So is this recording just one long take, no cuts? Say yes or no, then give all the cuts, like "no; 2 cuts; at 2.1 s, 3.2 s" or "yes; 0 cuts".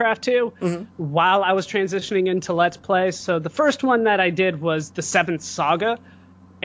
yes; 0 cuts